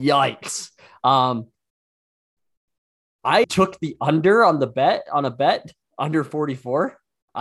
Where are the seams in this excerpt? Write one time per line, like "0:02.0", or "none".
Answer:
0:03.4

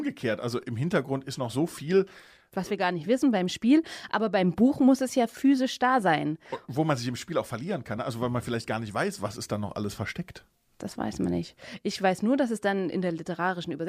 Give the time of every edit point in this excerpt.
none

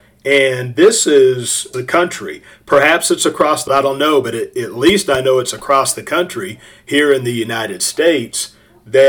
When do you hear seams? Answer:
0:01.7
0:03.7

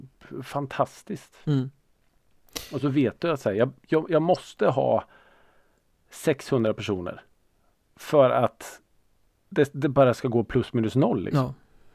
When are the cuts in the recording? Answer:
none

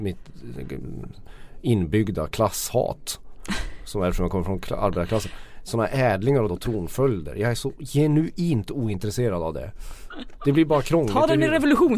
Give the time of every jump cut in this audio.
0:06.5

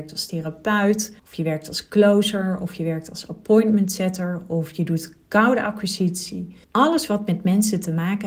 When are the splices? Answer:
0:01.2
0:06.6

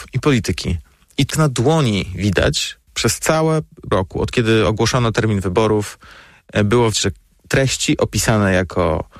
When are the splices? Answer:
0:01.3
0:03.9
0:06.9

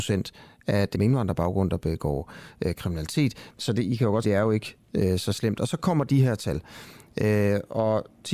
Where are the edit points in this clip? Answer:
0:00.9
0:04.2

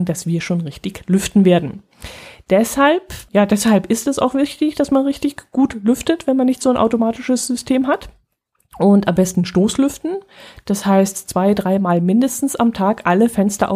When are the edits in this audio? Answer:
0:03.3

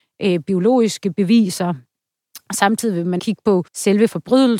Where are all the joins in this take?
0:03.2
0:03.7

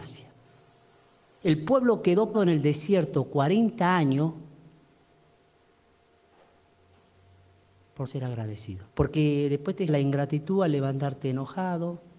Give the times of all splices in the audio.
0:02.3
0:08.1
0:08.9
0:09.9

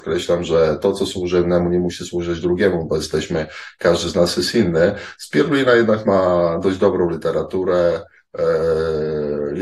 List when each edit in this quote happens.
none

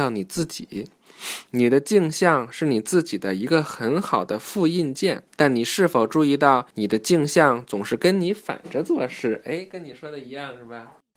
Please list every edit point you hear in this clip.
0:01.5
0:05.3
0:06.7

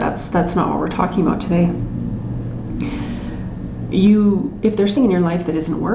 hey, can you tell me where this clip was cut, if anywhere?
0:05.0

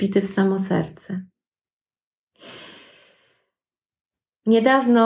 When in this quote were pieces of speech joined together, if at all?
none

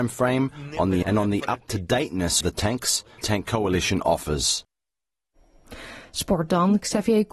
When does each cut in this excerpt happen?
0:01.0
0:02.4
0:03.2

